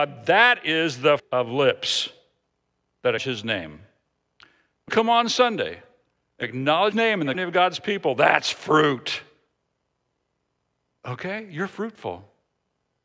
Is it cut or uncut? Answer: cut